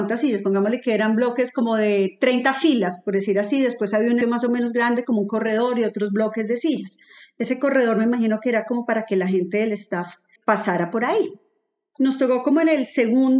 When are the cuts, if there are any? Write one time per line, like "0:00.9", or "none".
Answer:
0:04.2
0:10.4